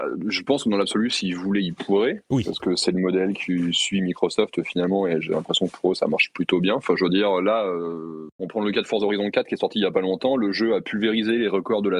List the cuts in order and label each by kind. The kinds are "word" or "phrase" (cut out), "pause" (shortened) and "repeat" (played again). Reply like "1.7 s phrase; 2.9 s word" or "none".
8.3 s pause